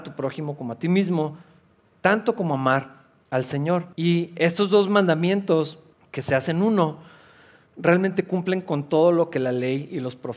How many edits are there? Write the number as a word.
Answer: two